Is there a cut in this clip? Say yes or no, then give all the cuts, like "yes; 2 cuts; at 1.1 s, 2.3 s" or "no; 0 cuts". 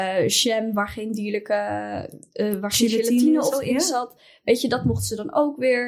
yes; 1 cut; at 3.5 s